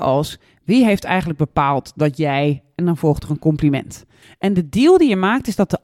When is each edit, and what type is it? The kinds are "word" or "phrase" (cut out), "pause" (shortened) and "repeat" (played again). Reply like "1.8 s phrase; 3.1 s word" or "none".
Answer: 4.2 s pause